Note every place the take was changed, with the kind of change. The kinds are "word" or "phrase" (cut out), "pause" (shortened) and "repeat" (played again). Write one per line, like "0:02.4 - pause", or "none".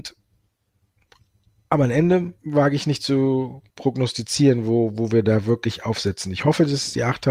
0:02.4 - pause
0:03.7 - pause